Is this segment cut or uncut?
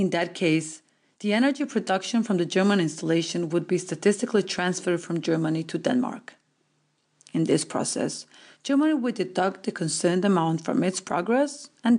uncut